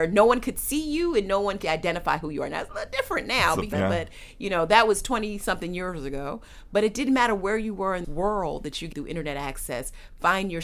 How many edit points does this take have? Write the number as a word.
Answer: four